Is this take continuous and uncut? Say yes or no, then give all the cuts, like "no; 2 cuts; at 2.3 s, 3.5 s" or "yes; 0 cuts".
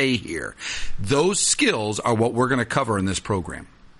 yes; 0 cuts